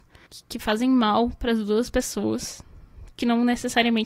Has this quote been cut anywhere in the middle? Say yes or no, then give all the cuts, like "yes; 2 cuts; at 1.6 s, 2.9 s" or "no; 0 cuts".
no; 0 cuts